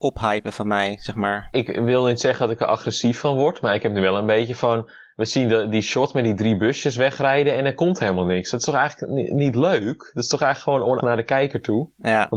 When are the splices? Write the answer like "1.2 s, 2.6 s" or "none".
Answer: 11.0 s